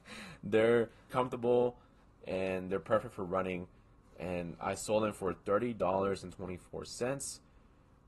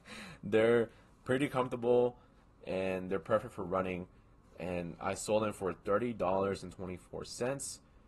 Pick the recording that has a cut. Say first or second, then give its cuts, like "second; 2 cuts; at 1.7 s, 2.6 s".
first; 1 cut; at 1.1 s